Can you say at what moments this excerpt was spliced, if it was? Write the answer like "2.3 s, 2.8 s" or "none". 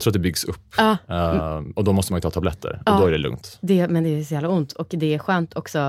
none